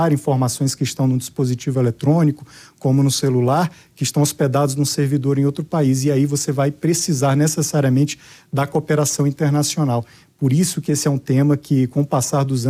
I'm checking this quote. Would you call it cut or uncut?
uncut